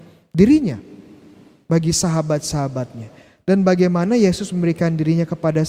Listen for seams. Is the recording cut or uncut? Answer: uncut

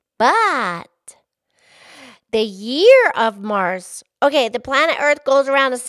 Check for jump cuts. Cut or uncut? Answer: uncut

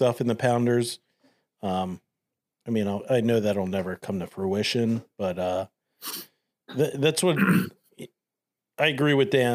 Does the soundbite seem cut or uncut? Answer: uncut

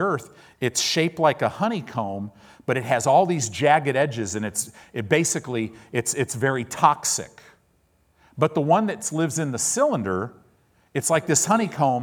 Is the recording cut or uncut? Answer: uncut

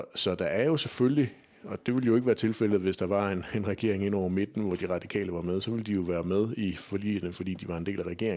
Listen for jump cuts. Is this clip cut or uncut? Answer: uncut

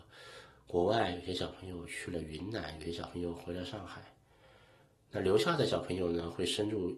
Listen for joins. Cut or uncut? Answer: uncut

